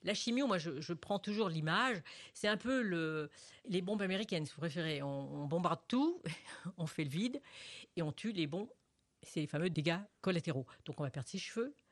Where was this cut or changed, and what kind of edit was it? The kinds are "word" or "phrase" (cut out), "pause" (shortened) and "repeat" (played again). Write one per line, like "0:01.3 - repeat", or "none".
none